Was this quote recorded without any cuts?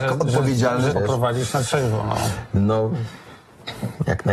no; 1 cut; at 0.9 s

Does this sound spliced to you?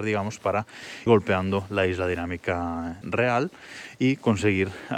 yes; 2 cuts; at 1.1 s, 3.0 s

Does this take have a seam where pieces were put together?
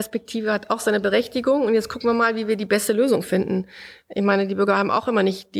no; 0 cuts

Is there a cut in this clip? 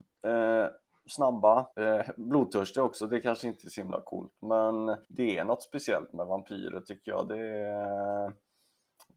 yes; 2 cuts; at 1.7 s, 5.0 s

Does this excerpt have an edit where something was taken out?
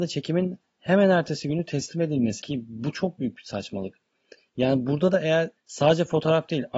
yes; 2 cuts; at 2.4 s, 5.6 s

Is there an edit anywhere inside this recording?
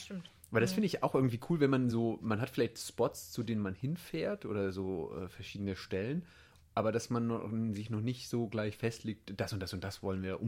no; 0 cuts

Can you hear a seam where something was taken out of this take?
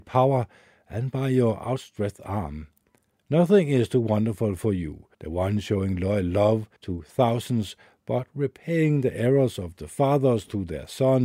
yes; 2 cuts; at 5.1 s, 6.8 s

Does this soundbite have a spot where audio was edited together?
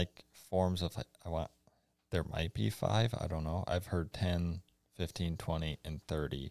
no; 0 cuts

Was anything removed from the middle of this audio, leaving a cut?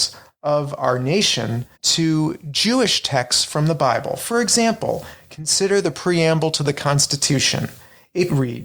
yes; 1 cut; at 1.7 s

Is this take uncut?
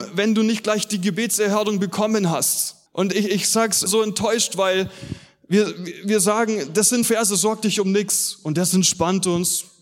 no; 3 cuts; at 2.9 s, 3.9 s, 7.0 s

